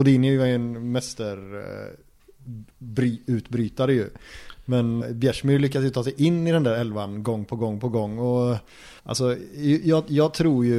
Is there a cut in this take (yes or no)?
yes